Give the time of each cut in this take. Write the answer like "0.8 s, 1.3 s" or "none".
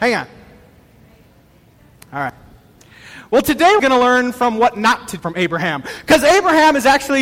3.8 s, 5.2 s

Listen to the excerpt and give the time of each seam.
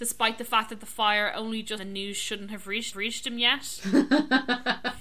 1.8 s, 2.9 s

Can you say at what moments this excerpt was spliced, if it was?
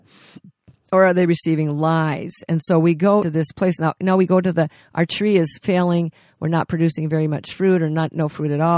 3.2 s

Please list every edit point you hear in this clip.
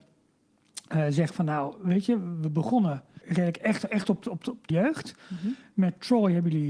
3.2 s, 4.7 s

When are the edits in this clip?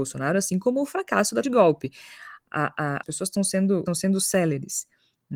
1.4 s, 3.0 s, 3.9 s

